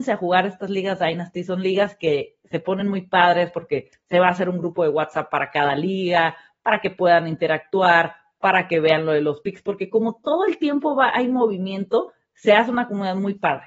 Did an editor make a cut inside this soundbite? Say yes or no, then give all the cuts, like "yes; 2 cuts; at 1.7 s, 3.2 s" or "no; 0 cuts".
no; 0 cuts